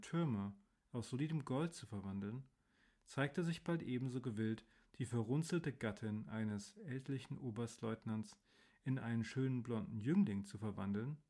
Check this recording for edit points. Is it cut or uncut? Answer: uncut